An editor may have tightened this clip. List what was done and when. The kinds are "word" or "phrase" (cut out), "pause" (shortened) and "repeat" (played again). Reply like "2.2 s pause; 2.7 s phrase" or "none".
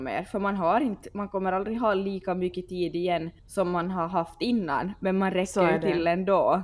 3.4 s pause